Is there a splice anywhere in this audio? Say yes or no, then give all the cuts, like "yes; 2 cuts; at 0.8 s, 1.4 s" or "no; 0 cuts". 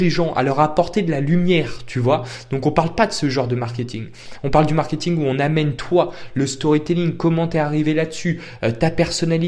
no; 0 cuts